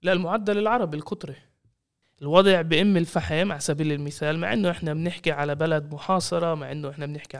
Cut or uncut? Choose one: uncut